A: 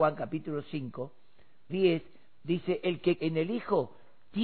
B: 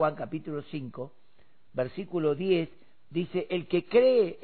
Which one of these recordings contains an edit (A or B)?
A